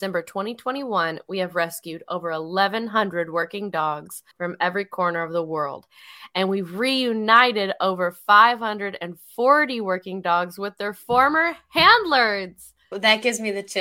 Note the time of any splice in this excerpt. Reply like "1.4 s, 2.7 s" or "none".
4.3 s, 12.8 s